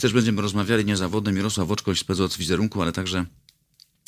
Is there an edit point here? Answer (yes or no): no